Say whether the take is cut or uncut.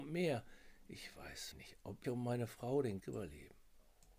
cut